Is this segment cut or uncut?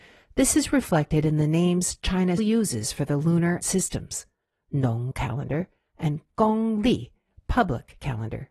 cut